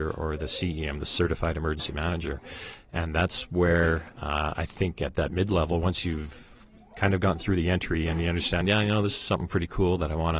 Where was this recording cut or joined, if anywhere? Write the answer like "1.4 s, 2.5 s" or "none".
none